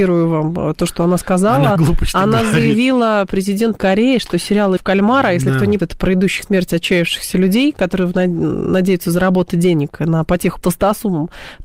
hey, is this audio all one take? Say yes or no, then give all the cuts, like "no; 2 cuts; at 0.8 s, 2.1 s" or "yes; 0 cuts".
no; 6 cuts; at 1.8 s, 3.8 s, 4.8 s, 5.8 s, 6.4 s, 10.6 s